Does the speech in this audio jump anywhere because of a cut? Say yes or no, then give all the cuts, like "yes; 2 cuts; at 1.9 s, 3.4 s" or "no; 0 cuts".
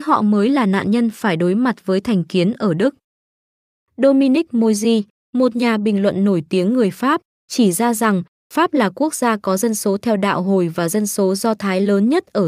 no; 0 cuts